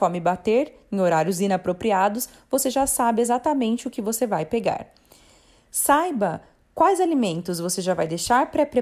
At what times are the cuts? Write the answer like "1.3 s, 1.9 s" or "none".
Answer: none